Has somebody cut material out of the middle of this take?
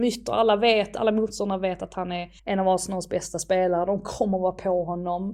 yes; 1 cut; at 2.4 s

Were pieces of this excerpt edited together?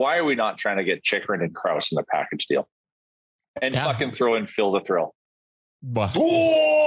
no; 0 cuts

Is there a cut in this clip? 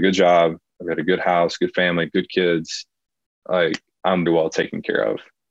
yes; 1 cut; at 4.3 s

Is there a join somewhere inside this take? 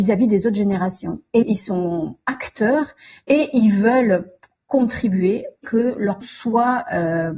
yes; 3 cuts; at 1.4 s, 5.6 s, 6.2 s

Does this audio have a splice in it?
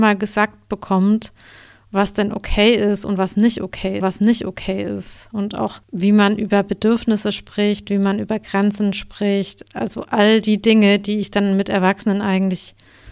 yes; 2 cuts; at 4.0 s, 5.8 s

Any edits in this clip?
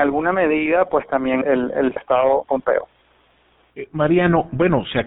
yes; 3 cuts; at 1.4 s, 2.0 s, 2.4 s

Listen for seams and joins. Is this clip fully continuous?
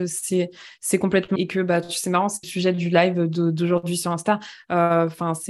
no; 2 cuts; at 1.4 s, 2.4 s

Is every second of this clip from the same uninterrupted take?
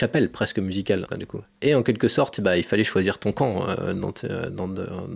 no; 1 cut; at 1.1 s

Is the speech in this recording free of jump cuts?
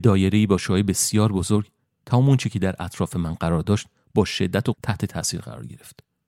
no; 1 cut; at 4.7 s

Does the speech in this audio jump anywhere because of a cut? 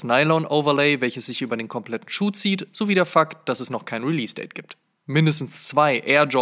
no; 0 cuts

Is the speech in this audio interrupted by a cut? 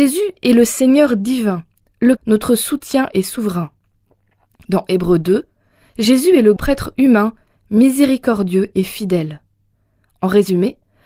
yes; 2 cuts; at 2.2 s, 6.6 s

